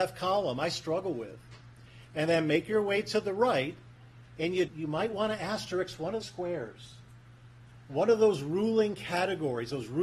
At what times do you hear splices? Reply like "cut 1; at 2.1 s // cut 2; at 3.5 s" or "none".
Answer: cut 1; at 4.7 s // cut 2; at 6.2 s